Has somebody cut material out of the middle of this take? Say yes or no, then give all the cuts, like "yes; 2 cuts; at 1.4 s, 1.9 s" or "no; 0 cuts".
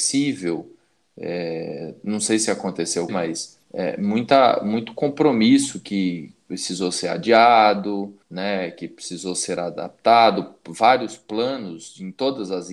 yes; 3 cuts; at 3.1 s, 3.6 s, 8.2 s